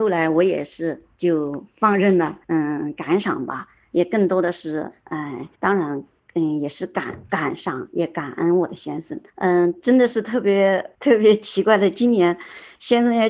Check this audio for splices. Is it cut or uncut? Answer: cut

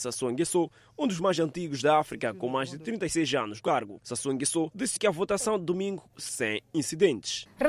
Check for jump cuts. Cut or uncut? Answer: cut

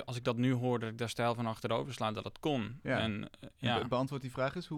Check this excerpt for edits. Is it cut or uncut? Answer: uncut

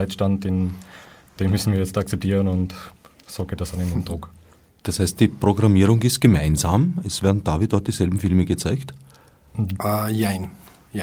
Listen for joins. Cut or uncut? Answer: uncut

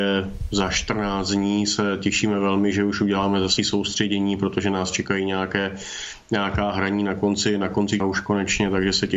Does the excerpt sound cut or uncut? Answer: cut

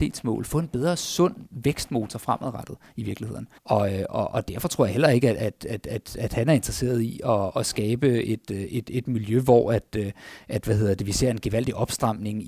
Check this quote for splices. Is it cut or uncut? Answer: cut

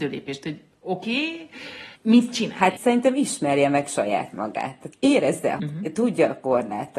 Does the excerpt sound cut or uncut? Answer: cut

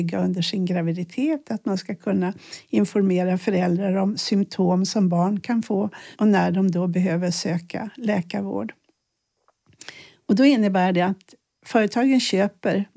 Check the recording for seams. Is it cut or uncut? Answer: uncut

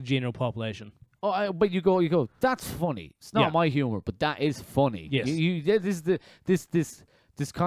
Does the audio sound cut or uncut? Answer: uncut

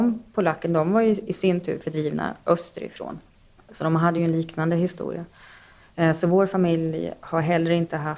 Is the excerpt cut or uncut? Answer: uncut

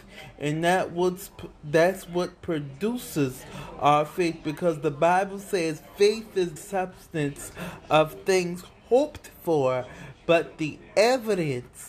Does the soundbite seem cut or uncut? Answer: cut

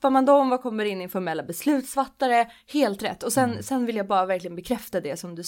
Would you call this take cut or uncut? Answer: uncut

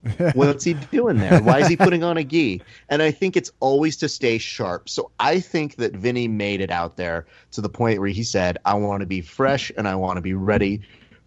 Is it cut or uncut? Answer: uncut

